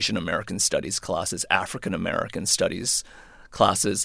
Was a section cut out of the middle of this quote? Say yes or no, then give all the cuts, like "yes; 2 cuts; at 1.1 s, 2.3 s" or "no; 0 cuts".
no; 0 cuts